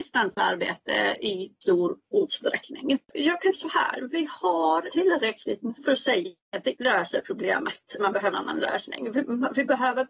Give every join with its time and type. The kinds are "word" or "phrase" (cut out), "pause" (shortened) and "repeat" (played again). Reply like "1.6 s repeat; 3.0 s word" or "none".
1.6 s word; 3.5 s word; 4.9 s word; 5.8 s word; 6.8 s word; 8.0 s word; 8.3 s word